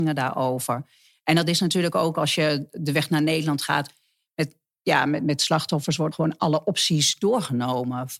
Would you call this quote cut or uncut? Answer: cut